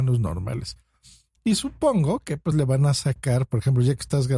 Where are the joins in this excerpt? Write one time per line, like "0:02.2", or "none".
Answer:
none